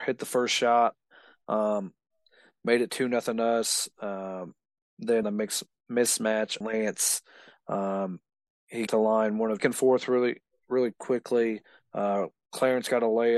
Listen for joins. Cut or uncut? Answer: cut